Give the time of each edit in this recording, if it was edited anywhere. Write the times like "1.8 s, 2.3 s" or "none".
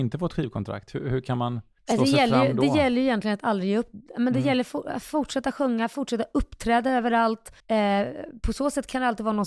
7.6 s